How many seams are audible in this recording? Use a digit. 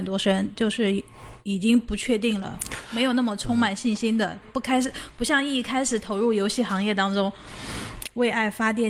1